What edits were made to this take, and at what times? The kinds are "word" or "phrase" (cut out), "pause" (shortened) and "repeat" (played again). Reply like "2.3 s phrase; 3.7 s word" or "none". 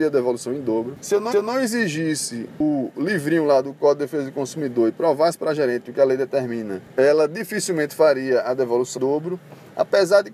1.3 s repeat; 9.0 s word